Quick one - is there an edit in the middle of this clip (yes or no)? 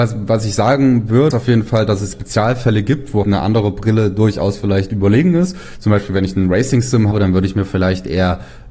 yes